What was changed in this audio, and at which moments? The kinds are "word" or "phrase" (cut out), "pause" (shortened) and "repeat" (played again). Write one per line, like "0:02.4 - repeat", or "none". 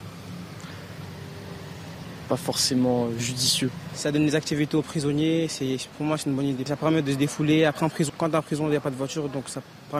0:08.1 - word